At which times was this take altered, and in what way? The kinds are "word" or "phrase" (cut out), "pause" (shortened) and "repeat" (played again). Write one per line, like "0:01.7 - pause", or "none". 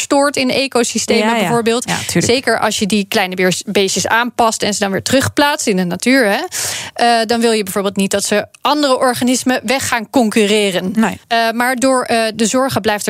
0:11.2 - pause